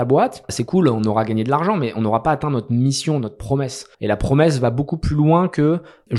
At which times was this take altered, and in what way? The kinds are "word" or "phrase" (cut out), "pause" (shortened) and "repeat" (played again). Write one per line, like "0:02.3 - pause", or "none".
none